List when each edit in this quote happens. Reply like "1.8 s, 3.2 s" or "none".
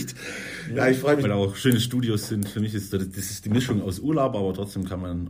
1.2 s, 2.9 s, 3.8 s